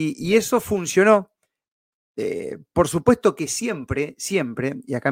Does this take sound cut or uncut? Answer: uncut